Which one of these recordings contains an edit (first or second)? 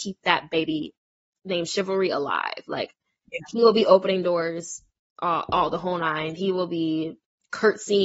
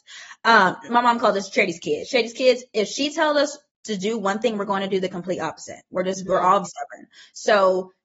second